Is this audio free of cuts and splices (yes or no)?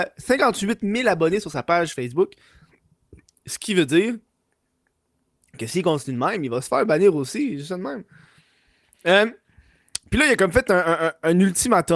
yes